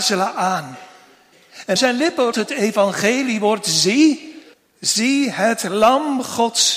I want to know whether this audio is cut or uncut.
cut